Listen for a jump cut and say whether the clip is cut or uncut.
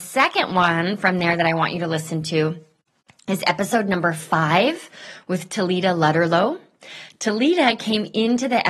uncut